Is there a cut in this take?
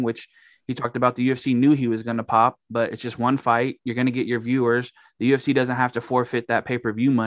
no; 0 cuts

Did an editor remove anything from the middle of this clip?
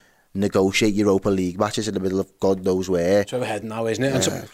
no; 0 cuts

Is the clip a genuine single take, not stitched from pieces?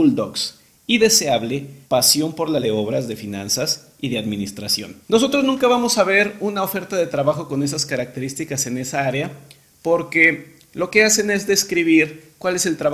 no; 3 cuts; at 1.8 s, 2.6 s, 5.0 s

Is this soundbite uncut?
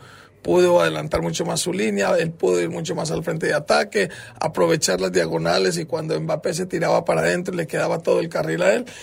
yes; 0 cuts

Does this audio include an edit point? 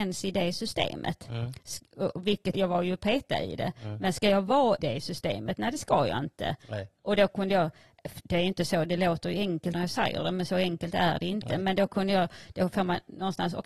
yes; 3 cuts; at 2.5 s, 4.8 s, 9.7 s

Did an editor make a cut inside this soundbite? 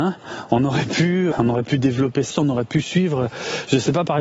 yes; 2 cuts; at 1.3 s, 2.3 s

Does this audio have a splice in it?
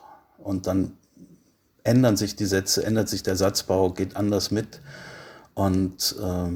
no; 0 cuts

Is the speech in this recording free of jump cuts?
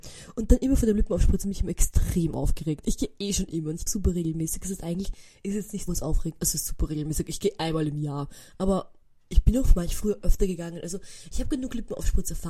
no; 3 cuts; at 3.9 s, 5.9 s, 9.0 s

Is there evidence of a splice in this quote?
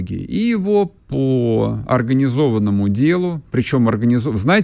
no; 0 cuts

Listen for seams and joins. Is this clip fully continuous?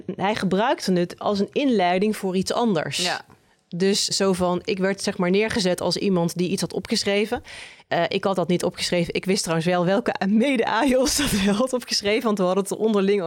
no; 2 cuts; at 4.1 s, 7.8 s

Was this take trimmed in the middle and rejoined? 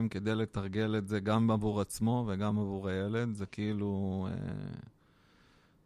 no; 0 cuts

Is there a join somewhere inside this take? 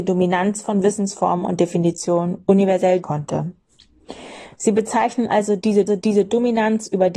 yes; 2 cuts; at 3.0 s, 5.9 s

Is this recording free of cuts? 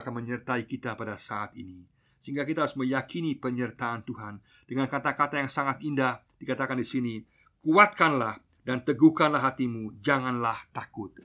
yes; 0 cuts

